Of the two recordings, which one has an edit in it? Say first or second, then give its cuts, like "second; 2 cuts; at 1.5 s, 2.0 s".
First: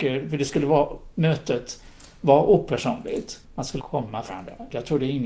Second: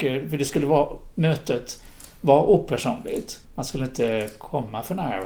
first; 2 cuts; at 3.8 s, 4.3 s